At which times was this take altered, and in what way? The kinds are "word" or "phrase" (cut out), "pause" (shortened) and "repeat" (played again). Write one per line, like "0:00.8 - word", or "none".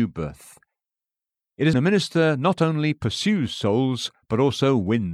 0:01.7 - phrase